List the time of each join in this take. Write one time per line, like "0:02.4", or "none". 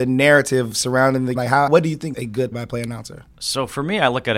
0:01.4
0:01.7
0:02.1
0:02.5